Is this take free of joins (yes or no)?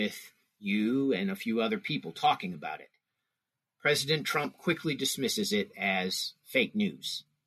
yes